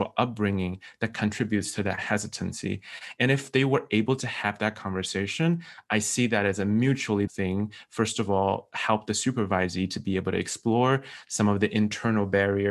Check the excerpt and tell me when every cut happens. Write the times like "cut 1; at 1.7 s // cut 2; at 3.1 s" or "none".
cut 1; at 7.3 s